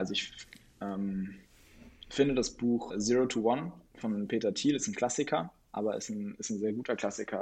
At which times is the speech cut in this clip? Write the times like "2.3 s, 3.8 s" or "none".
2.9 s